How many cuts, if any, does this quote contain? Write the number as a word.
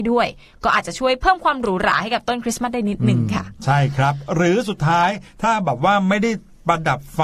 zero